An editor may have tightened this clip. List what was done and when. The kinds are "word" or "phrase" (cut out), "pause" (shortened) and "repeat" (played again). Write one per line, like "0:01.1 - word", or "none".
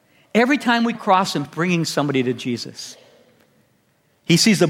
0:00.9 - word
0:01.4 - word